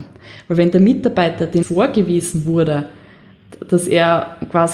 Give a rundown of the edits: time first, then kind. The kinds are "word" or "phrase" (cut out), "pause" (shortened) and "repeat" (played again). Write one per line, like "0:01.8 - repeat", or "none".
0:01.6 - phrase